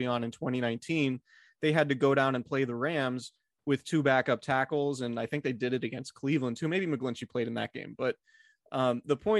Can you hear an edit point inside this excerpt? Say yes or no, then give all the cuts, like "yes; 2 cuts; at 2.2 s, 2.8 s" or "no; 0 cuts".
no; 0 cuts